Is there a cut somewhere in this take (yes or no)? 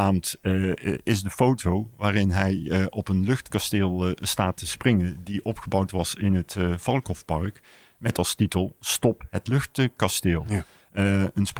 no